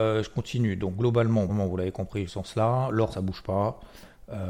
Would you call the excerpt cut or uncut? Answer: cut